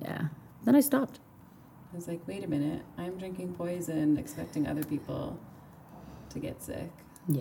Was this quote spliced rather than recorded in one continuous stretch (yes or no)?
no